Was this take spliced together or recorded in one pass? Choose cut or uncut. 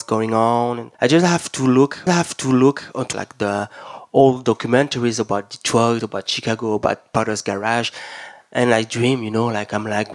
cut